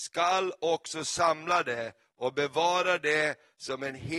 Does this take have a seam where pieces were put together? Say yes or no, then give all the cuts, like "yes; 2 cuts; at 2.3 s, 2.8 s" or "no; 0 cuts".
no; 0 cuts